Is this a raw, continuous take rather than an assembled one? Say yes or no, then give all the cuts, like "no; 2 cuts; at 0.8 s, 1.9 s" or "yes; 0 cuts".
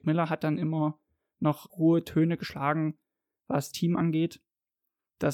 no; 2 cuts; at 1.7 s, 3.7 s